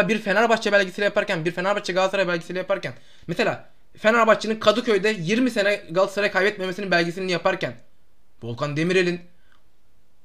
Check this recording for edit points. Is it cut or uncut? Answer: uncut